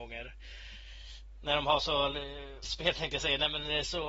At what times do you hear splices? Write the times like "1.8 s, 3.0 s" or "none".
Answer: 2.6 s